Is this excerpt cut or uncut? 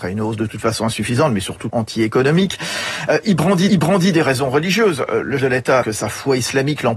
cut